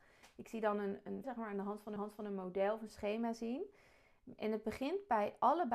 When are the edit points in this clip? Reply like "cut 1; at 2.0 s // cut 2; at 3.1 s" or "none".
cut 1; at 1.2 s // cut 2; at 2.0 s